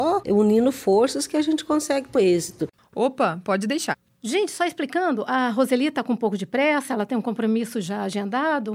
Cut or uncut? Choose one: cut